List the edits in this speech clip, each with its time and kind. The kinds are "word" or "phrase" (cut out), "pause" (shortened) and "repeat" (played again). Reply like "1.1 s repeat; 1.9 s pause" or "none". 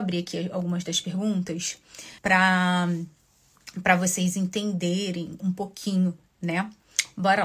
2.2 s pause; 5.4 s word